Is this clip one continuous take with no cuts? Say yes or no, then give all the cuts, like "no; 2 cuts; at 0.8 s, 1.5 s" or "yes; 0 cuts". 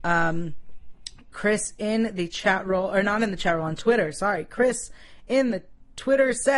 yes; 0 cuts